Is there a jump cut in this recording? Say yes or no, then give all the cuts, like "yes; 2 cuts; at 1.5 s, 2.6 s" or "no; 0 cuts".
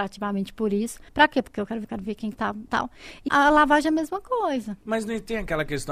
yes; 5 cuts; at 1.1 s, 1.8 s, 2.7 s, 3.3 s, 4.8 s